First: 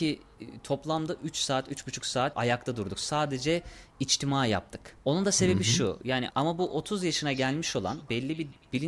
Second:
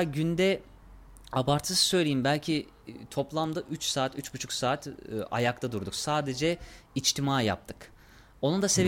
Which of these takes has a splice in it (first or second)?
first